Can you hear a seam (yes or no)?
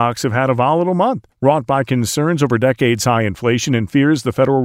yes